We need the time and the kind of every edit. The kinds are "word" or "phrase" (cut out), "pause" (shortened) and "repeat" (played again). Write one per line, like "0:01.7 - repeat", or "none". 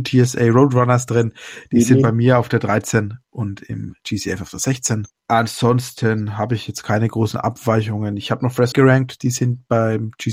0:05.2 - pause
0:08.7 - word